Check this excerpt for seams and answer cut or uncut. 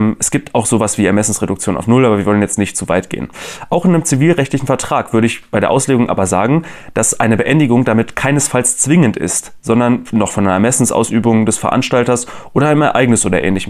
uncut